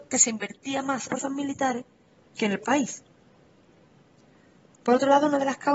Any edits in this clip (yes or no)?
yes